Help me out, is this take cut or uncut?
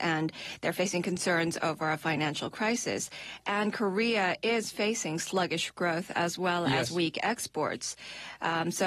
uncut